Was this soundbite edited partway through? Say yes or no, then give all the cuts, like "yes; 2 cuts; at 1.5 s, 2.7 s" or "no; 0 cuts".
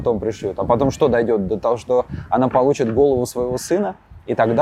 no; 0 cuts